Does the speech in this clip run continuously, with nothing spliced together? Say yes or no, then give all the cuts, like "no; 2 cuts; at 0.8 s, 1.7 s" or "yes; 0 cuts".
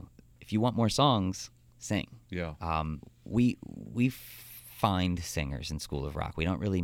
yes; 0 cuts